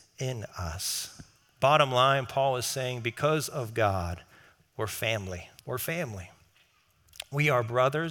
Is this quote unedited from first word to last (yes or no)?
no